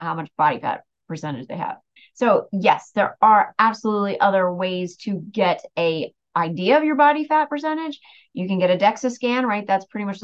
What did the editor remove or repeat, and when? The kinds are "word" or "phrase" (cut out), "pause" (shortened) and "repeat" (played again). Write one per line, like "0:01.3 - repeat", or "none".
0:02.0 - pause

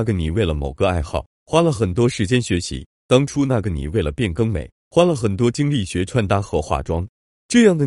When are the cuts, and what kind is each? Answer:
0:03.0 - pause

